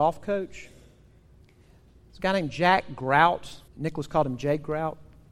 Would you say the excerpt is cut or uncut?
cut